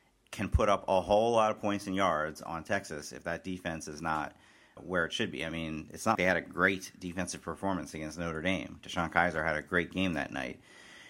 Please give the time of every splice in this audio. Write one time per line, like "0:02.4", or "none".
0:04.8
0:06.1